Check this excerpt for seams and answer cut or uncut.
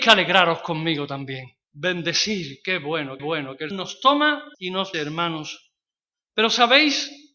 cut